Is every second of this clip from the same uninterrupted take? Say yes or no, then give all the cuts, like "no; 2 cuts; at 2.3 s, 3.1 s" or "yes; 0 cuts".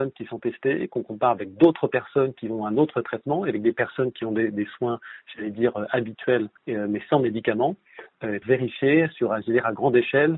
no; 2 cuts; at 6.6 s, 8.4 s